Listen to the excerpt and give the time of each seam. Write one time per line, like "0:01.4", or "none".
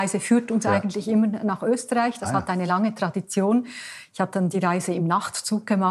none